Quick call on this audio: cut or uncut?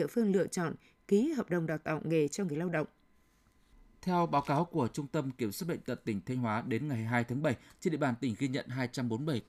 uncut